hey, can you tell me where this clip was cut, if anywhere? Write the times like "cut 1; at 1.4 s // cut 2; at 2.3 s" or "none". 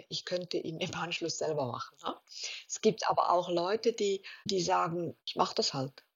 cut 1; at 4.4 s // cut 2; at 5.2 s